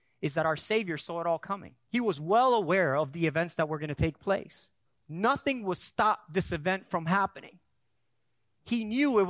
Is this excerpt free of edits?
no; 2 cuts; at 1.8 s, 4.8 s

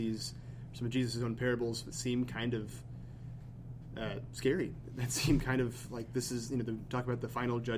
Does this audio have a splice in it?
no; 0 cuts

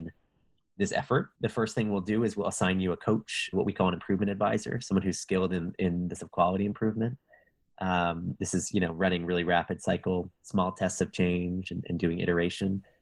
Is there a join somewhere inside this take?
yes; 3 cuts; at 1.3 s, 3.5 s, 6.2 s

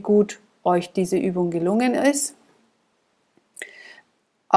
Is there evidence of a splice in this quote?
no; 0 cuts

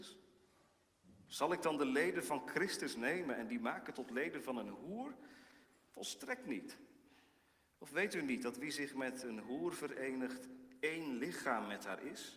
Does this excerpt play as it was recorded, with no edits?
yes; 0 cuts

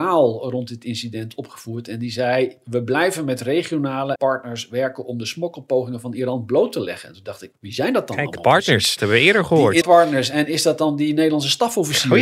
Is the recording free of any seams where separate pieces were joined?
no; 4 cuts; at 4.2 s, 7.5 s, 9.0 s, 9.8 s

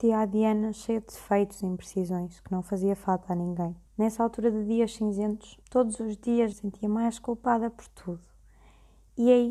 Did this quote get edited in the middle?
yes; 3 cuts; at 3.9 s, 5.6 s, 6.5 s

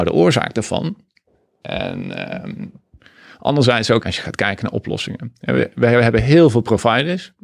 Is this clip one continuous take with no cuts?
no; 2 cuts; at 3.0 s, 4.0 s

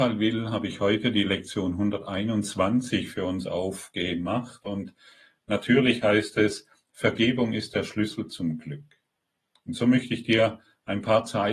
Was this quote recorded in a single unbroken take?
yes; 0 cuts

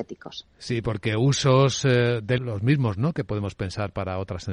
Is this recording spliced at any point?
yes; 1 cut; at 2.4 s

